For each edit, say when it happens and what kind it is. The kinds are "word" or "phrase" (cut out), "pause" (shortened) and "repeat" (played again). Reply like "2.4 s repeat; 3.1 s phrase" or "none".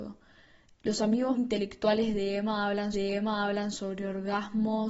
1.4 s word; 2.9 s repeat